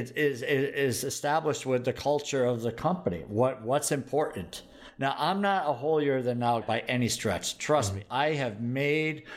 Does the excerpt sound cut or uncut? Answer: cut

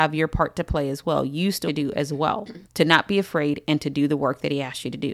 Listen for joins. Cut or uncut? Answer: cut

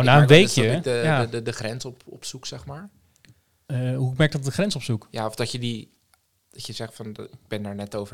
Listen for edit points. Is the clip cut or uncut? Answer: uncut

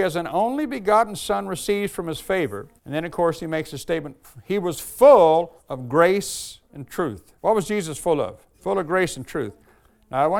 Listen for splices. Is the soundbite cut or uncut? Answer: cut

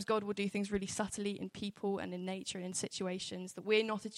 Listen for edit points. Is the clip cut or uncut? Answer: uncut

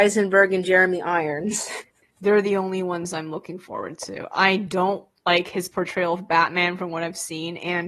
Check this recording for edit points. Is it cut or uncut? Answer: uncut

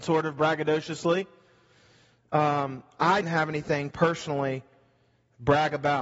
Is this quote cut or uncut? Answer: cut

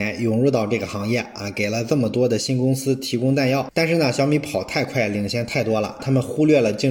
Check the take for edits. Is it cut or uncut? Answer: cut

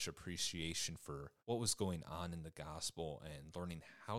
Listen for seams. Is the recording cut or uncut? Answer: cut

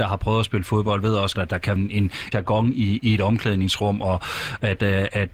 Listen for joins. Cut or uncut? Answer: cut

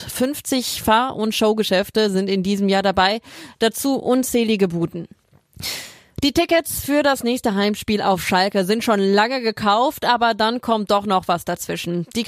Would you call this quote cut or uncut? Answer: uncut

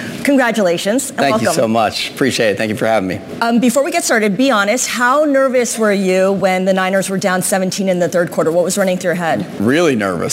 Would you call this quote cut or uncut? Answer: uncut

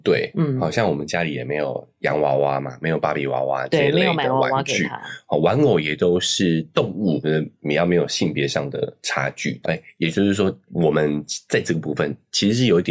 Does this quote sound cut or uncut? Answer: cut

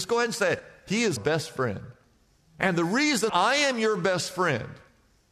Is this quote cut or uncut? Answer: cut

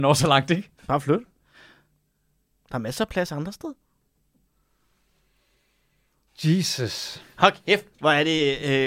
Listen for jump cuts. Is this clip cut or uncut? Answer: uncut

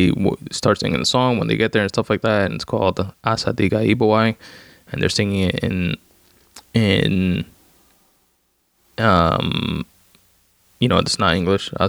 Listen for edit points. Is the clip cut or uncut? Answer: uncut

